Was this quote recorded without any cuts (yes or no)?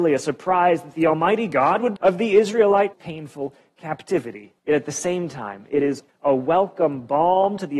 no